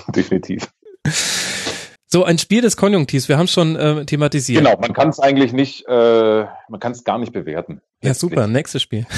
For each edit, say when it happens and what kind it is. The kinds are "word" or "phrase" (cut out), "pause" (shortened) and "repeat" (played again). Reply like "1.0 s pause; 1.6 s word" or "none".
2.0 s pause; 7.9 s pause